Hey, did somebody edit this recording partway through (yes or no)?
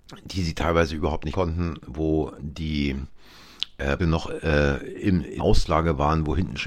yes